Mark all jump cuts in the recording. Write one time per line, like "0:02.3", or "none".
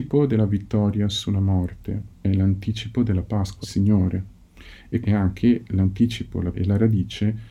0:02.1
0:03.6
0:05.0
0:06.5